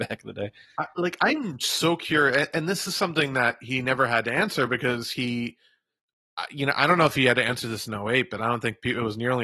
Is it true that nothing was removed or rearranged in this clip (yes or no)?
yes